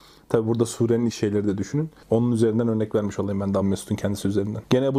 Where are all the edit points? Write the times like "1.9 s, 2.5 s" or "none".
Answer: 1.1 s, 3.6 s